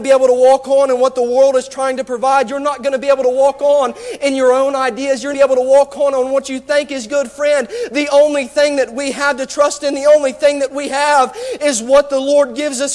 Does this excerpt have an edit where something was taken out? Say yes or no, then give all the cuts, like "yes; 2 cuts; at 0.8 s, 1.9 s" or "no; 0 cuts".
yes; 1 cut; at 5.3 s